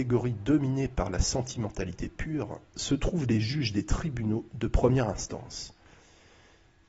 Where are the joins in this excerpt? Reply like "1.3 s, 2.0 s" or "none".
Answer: none